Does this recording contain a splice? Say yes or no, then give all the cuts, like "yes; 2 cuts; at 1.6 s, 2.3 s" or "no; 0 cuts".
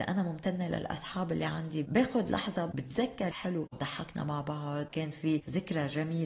yes; 1 cut; at 3.3 s